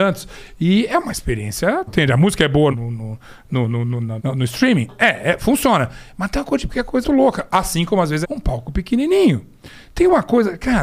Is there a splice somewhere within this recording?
yes; 6 cuts; at 1.9 s, 2.7 s, 4.2 s, 6.7 s, 7.0 s, 8.2 s

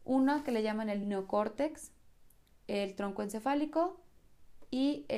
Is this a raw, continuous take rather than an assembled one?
yes; 0 cuts

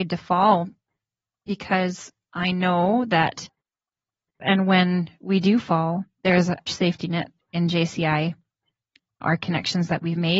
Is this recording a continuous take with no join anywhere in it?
no; 3 cuts; at 4.4 s, 6.7 s, 9.2 s

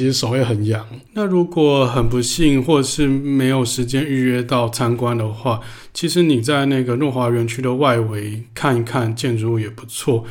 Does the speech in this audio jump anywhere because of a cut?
yes; 1 cut; at 1.1 s

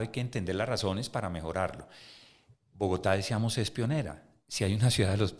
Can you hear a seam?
no; 0 cuts

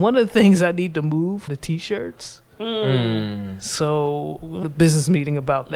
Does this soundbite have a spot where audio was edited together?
yes; 2 cuts; at 1.5 s, 4.6 s

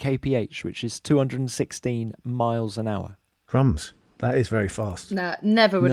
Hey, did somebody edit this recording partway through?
no; 0 cuts

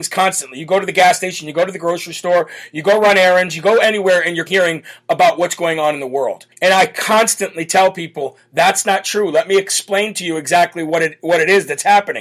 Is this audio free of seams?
no; 2 cuts; at 4.5 s, 6.5 s

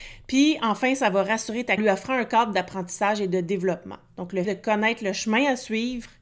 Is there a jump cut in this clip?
yes; 2 cuts; at 1.8 s, 4.4 s

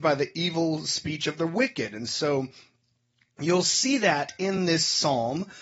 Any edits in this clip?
no; 0 cuts

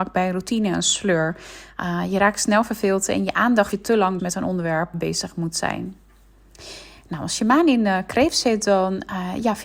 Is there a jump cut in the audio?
yes; 3 cuts; at 3.7 s, 4.2 s, 4.9 s

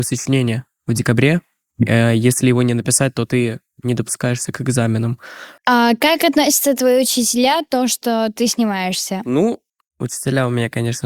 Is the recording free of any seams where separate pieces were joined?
yes; 0 cuts

